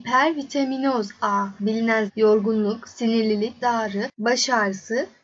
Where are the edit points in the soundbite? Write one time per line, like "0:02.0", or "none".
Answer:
0:01.6
0:02.1
0:03.6